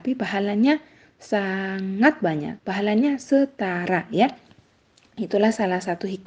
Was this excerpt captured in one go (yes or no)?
no